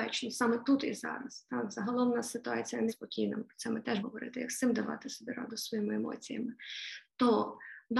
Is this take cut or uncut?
cut